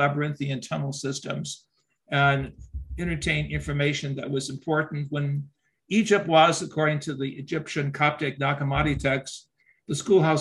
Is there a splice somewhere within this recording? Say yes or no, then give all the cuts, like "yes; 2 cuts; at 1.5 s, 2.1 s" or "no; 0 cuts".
no; 0 cuts